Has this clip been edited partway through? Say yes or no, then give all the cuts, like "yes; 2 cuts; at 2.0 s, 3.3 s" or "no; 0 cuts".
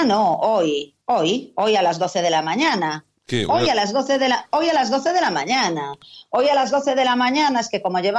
yes; 1 cut; at 1.0 s